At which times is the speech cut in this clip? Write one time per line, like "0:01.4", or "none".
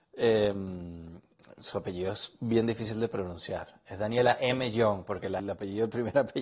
0:05.4